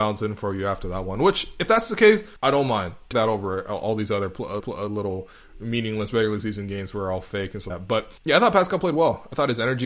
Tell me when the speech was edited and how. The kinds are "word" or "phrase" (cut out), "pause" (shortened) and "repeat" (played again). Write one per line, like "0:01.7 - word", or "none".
0:02.4 - pause
0:03.1 - phrase
0:04.6 - repeat
0:07.7 - word
0:08.2 - pause